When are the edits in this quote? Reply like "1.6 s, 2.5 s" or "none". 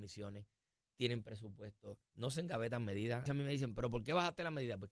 2.1 s, 3.3 s